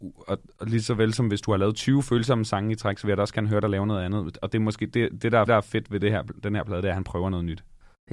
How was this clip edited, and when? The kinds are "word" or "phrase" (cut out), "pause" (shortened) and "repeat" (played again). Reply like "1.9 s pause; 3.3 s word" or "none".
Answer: 5.5 s repeat

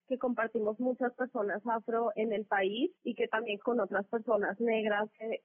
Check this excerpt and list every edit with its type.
2.1 s word; 3.0 s pause; 3.6 s word

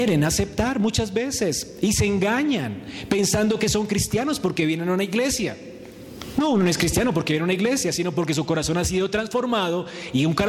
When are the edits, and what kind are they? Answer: none

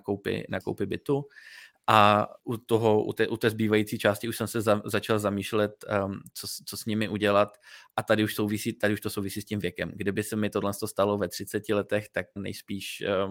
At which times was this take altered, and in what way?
2.4 s word; 12.4 s word

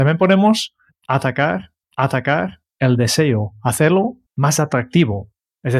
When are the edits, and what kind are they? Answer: 1.8 s repeat; 4.3 s pause

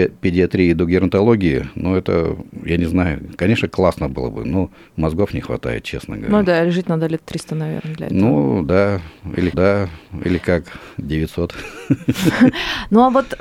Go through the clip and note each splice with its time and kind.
9.5 s repeat

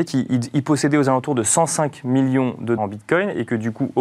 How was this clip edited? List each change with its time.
2.8 s word

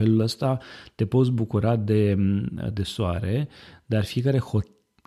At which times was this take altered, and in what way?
none

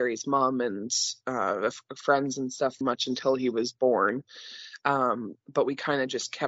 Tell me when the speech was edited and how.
2.8 s phrase

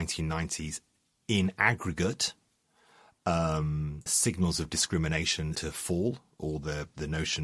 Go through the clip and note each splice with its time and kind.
4.1 s word; 5.5 s word

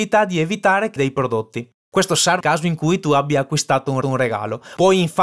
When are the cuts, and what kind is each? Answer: 1.0 s phrase; 2.4 s word; 4.0 s repeat

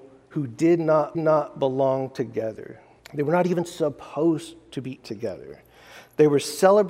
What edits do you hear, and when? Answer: 1.1 s repeat; 3.0 s pause; 5.0 s word

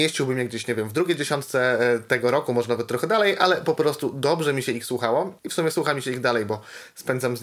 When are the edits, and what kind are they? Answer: 5.4 s pause

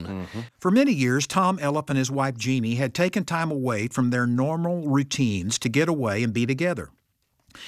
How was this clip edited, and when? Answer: none

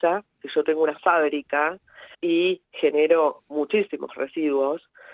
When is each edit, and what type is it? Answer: 2.1 s pause

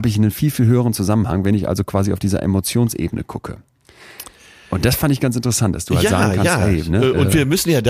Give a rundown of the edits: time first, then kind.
none

